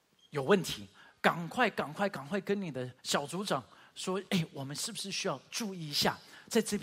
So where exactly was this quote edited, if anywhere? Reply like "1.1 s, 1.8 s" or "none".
3.0 s